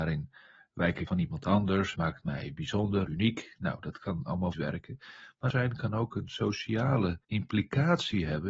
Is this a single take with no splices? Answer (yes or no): no